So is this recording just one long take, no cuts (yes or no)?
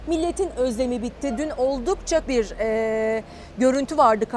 no